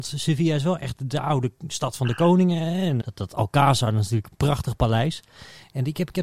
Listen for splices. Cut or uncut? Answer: cut